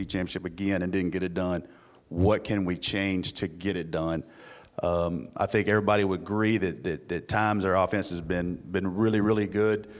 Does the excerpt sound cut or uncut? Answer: uncut